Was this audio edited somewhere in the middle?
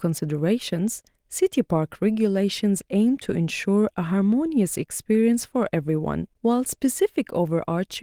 yes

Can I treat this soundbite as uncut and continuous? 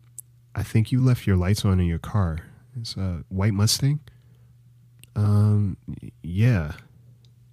yes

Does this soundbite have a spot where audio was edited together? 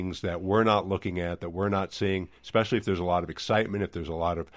no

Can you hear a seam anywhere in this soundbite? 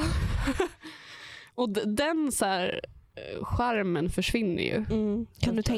no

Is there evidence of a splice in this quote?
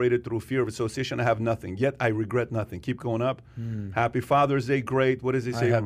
no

